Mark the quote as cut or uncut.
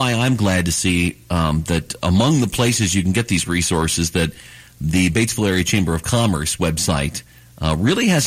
uncut